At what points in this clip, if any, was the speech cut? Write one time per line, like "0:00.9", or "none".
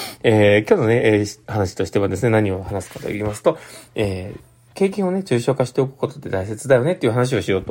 0:01.4